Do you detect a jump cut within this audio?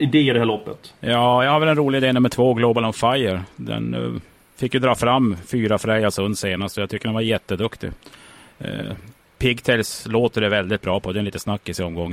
no; 0 cuts

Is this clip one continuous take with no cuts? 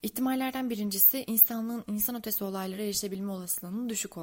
yes; 0 cuts

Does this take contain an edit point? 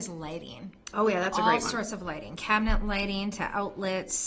no; 0 cuts

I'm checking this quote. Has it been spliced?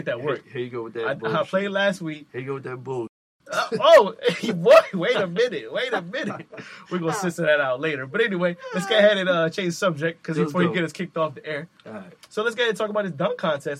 no; 0 cuts

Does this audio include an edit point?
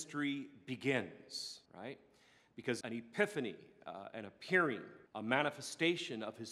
yes; 3 cuts; at 1.7 s, 2.8 s, 5.1 s

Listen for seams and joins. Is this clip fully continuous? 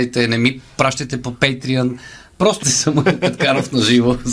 no; 1 cut; at 2.6 s

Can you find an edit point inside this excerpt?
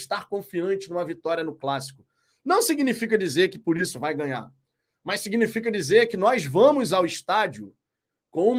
no; 0 cuts

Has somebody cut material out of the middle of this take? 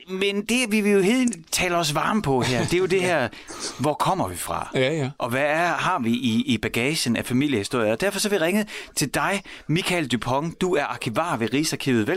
no; 0 cuts

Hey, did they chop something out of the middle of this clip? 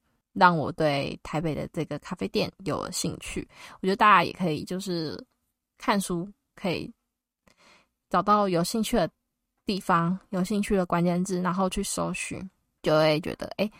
no; 0 cuts

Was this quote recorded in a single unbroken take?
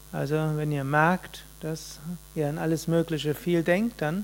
no; 1 cut; at 2.2 s

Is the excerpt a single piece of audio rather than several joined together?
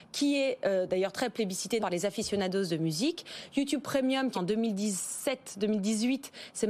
no; 2 cuts; at 1.8 s, 4.3 s

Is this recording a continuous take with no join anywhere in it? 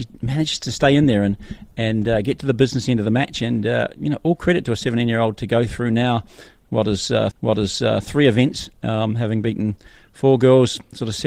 no; 1 cut; at 7.3 s

